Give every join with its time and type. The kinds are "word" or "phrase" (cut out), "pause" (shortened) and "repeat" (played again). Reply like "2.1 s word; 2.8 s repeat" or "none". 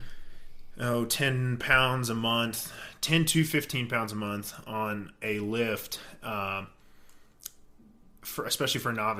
none